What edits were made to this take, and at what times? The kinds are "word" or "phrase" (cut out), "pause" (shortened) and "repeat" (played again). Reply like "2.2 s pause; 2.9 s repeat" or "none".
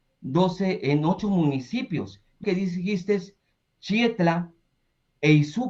2.4 s word